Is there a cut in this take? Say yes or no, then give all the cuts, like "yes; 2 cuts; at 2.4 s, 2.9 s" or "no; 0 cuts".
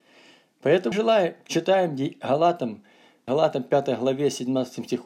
yes; 2 cuts; at 0.9 s, 3.3 s